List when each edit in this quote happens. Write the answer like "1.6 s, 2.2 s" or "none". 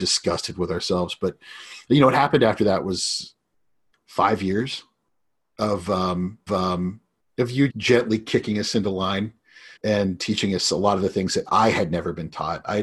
3.9 s, 6.5 s, 7.7 s, 9.8 s